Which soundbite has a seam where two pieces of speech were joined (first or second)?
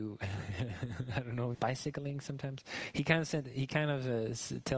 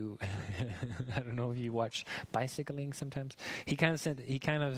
first